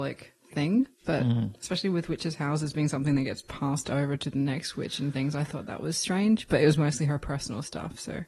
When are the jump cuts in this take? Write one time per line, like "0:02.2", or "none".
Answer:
0:00.9